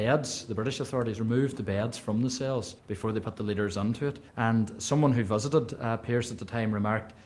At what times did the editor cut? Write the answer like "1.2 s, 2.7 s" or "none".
2.8 s, 4.3 s